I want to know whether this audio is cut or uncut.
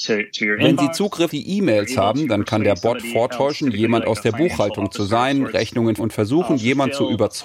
cut